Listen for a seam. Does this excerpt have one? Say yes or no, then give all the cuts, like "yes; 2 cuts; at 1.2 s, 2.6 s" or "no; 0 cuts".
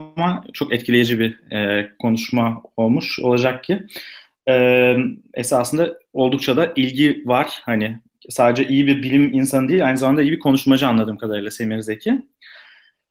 no; 0 cuts